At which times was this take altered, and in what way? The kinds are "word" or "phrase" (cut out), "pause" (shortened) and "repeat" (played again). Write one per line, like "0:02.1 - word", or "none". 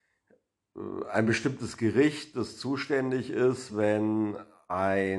none